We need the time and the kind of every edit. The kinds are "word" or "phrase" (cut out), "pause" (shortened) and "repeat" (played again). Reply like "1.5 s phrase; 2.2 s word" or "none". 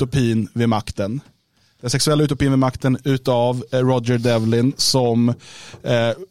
none